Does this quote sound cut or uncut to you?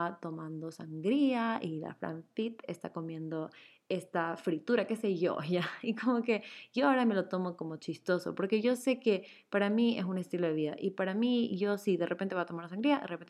uncut